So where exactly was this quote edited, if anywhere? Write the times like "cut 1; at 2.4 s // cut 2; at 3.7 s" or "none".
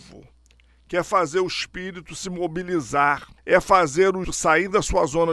cut 1; at 3.4 s // cut 2; at 4.2 s